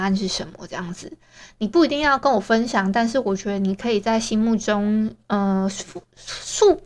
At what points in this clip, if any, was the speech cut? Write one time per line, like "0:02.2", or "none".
0:05.2